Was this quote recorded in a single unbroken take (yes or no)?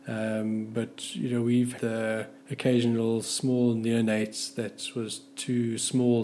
no